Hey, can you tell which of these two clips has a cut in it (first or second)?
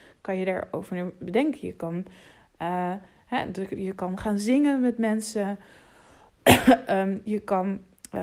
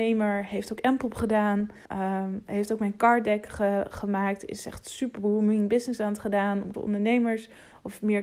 second